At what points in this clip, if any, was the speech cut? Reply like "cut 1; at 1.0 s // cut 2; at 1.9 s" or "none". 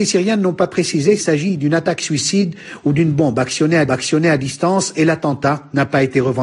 cut 1; at 1.2 s // cut 2; at 3.9 s